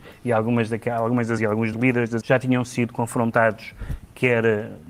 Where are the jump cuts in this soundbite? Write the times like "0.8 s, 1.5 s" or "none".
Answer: 1.4 s, 1.7 s, 2.2 s